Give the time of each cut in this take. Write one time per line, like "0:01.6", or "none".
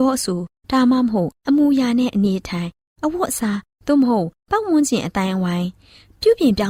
none